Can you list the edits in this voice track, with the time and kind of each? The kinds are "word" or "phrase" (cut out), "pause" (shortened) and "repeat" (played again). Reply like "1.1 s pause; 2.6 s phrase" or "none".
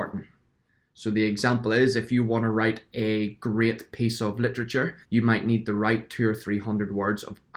5.0 s pause